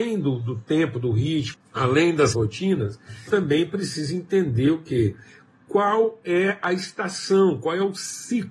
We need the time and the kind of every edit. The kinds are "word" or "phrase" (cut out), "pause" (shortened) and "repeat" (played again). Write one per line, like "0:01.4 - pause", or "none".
0:01.5 - phrase
0:02.3 - phrase
0:03.3 - word